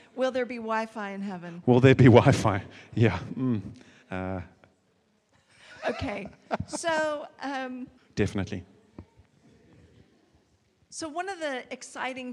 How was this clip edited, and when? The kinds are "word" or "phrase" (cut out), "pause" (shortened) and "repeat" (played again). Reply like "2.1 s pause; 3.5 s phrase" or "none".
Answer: 4.0 s pause; 8.0 s pause